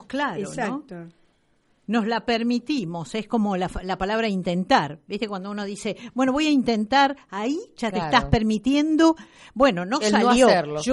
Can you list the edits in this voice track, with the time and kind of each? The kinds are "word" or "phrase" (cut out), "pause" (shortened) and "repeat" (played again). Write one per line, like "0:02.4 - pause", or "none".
none